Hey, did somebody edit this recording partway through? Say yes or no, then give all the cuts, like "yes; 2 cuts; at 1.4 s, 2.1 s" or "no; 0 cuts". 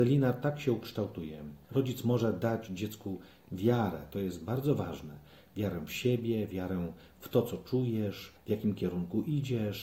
no; 0 cuts